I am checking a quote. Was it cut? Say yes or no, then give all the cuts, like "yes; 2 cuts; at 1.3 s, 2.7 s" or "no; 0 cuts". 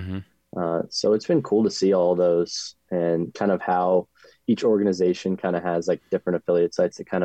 no; 0 cuts